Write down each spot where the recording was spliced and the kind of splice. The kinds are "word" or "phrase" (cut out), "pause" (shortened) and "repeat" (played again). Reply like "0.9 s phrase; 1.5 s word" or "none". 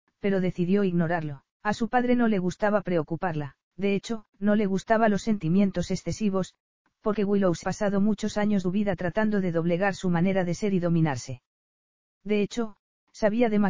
1.5 s pause; 3.7 s pause; 4.3 s pause; 7.1 s word; 7.6 s word; 8.6 s phrase